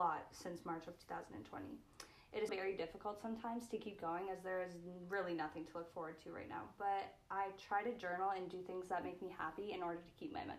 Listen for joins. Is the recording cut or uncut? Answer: cut